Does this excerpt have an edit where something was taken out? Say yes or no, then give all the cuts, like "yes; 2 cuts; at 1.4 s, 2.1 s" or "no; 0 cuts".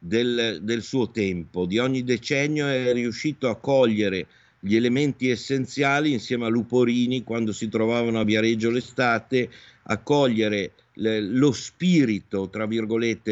no; 0 cuts